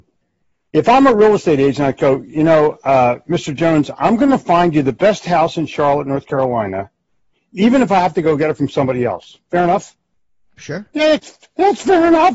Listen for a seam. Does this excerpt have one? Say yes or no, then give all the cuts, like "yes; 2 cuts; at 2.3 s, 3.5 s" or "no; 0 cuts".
no; 0 cuts